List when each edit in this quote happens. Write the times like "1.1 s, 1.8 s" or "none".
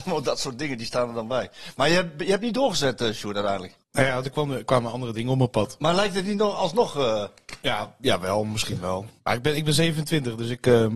3.8 s, 9.2 s